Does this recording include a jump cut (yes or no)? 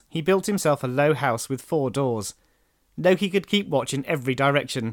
no